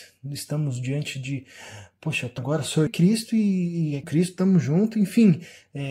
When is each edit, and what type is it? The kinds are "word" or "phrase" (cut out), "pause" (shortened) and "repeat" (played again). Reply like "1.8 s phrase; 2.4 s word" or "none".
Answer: 2.4 s word; 2.9 s phrase; 4.0 s phrase